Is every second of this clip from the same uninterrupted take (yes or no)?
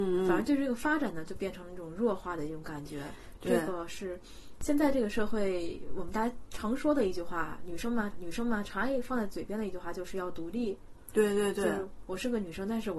no